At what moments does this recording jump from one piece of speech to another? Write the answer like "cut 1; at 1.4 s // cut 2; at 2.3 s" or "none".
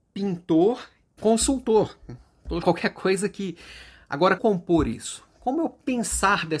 cut 1; at 1.2 s // cut 2; at 2.6 s // cut 3; at 4.4 s